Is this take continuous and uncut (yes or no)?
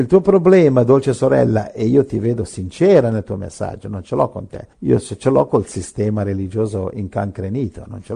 no